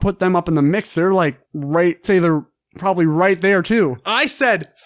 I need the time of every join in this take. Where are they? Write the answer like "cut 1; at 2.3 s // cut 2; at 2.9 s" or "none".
cut 1; at 1.5 s // cut 2; at 2.0 s